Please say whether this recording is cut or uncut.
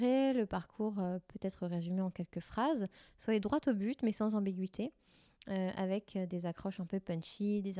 uncut